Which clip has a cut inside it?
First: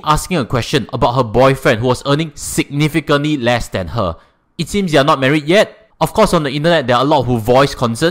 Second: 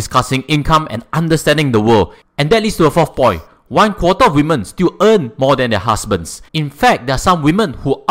second; 1 cut; at 6.5 s

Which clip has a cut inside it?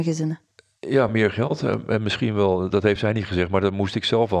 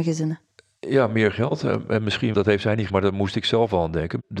second; 2 cuts; at 2.3 s, 2.9 s

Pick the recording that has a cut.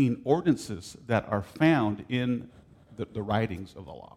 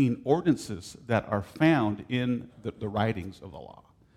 second; 1 cut; at 2.5 s

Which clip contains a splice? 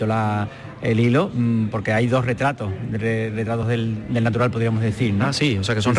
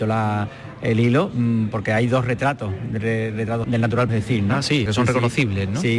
second; 3 cuts; at 3.6 s, 4.1 s, 4.9 s

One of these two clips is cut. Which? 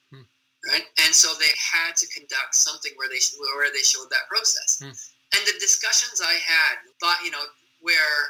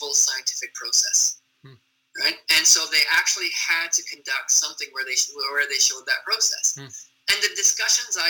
first; 2 cuts; at 1.5 s, 6.9 s

